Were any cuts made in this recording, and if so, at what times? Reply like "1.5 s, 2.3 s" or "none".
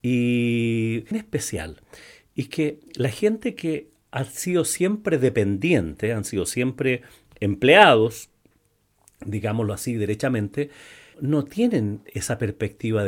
1.1 s, 11.1 s